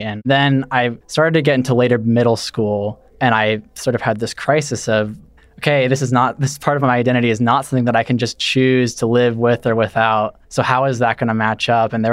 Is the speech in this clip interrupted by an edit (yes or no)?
yes